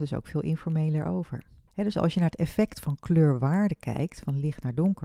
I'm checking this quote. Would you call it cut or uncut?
uncut